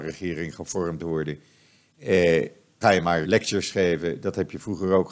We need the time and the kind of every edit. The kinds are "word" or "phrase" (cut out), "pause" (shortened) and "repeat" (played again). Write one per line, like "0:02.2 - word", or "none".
0:02.8 - word
0:03.2 - word